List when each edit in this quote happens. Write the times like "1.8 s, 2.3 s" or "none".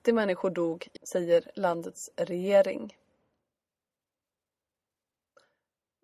1.0 s